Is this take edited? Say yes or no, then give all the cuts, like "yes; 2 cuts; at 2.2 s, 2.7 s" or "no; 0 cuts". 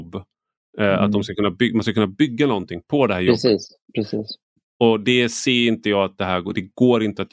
no; 0 cuts